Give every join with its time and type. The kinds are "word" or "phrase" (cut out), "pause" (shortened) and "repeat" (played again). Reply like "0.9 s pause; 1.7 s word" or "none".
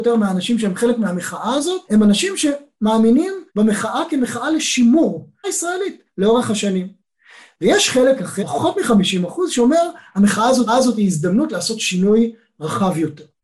1.8 s pause; 3.5 s pause; 5.4 s phrase; 6.1 s phrase; 8.4 s word; 10.7 s repeat